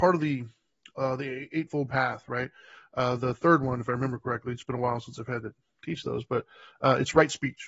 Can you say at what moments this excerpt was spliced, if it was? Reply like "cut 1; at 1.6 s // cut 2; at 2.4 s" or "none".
none

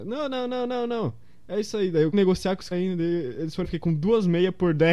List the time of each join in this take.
cut 1; at 2.1 s // cut 2; at 2.7 s // cut 3; at 3.6 s

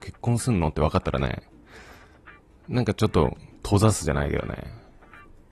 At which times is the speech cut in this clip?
none

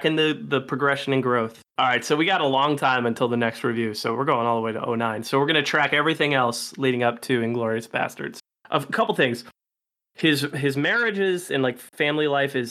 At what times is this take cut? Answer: none

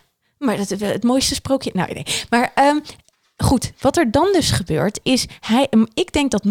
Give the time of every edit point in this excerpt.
none

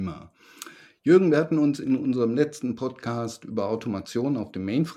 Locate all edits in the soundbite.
none

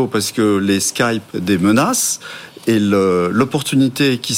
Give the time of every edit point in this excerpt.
cut 1; at 1.3 s

